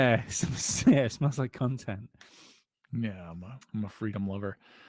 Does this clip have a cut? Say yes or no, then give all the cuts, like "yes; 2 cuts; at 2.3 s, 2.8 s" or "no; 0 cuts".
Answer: no; 0 cuts